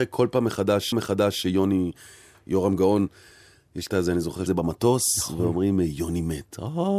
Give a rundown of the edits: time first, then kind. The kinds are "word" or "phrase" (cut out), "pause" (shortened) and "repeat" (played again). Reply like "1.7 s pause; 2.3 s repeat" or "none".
0.9 s repeat; 3.9 s word; 4.5 s phrase